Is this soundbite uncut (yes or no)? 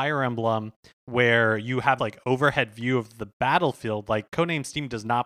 no